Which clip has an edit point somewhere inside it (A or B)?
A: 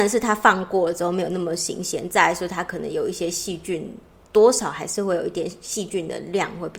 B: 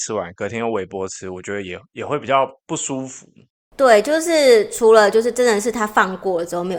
B